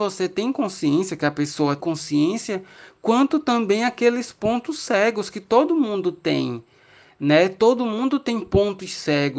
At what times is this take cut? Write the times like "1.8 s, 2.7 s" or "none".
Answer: 1.8 s